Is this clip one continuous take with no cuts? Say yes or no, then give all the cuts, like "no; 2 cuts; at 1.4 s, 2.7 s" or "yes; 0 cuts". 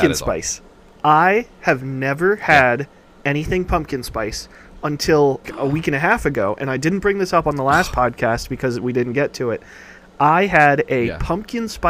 no; 1 cut; at 5.4 s